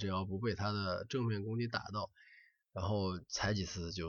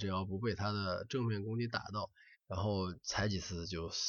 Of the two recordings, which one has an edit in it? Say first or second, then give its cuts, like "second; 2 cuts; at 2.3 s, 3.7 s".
second; 1 cut; at 2.3 s